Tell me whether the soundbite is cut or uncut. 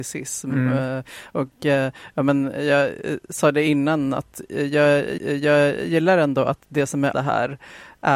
cut